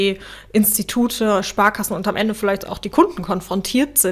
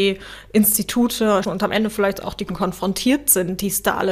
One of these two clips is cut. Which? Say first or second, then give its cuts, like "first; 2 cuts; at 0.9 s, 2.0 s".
second; 2 cuts; at 1.4 s, 2.5 s